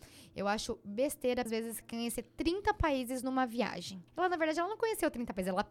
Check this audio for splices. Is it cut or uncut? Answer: cut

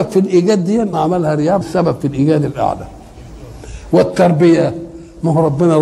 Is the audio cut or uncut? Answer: cut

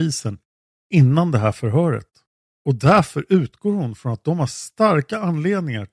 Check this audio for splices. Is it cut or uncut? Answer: cut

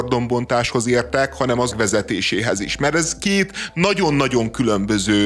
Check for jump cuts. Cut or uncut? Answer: cut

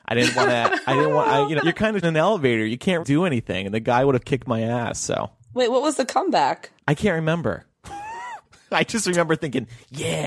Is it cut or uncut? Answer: cut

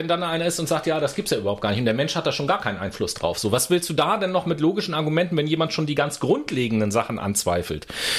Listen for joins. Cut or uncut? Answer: uncut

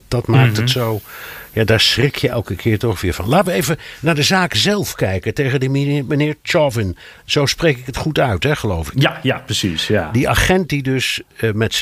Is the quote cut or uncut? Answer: uncut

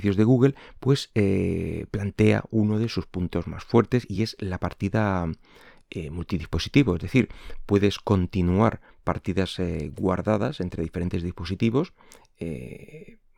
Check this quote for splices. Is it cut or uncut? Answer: uncut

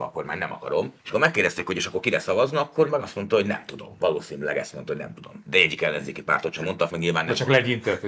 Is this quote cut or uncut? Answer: cut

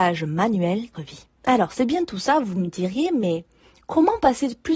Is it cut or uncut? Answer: cut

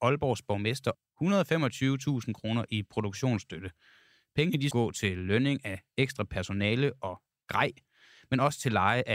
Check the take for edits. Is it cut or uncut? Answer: cut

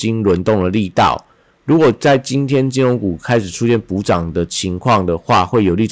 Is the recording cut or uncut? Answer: uncut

